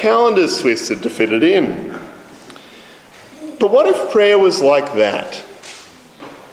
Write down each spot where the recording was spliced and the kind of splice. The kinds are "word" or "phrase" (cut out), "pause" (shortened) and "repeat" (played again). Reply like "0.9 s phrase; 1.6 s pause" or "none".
none